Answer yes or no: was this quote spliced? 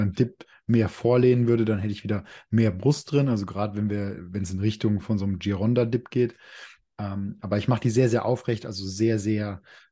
no